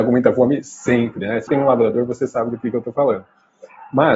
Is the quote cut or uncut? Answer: cut